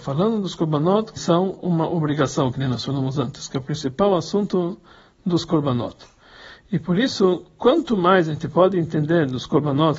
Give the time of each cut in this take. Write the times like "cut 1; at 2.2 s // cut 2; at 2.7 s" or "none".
cut 1; at 1.2 s